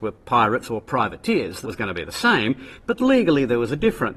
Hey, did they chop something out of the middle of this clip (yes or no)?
yes